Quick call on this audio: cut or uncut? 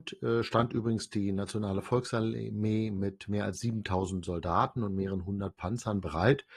uncut